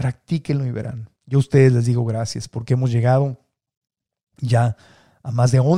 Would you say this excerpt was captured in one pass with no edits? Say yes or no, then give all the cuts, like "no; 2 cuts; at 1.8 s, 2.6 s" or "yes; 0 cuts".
no; 1 cut; at 1.2 s